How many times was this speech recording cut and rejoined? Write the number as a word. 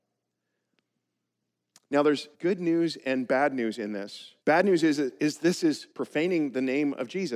three